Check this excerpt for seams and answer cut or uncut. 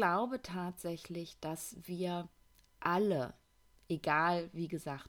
uncut